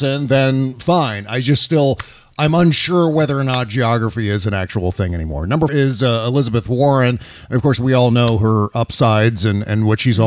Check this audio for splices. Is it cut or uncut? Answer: cut